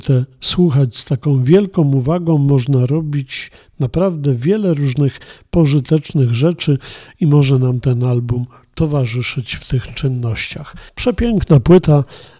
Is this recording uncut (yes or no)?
no